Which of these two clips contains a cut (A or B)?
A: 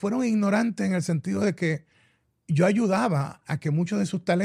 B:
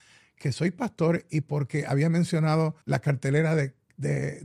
B